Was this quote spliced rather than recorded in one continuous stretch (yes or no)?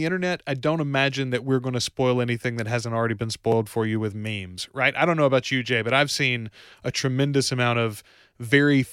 no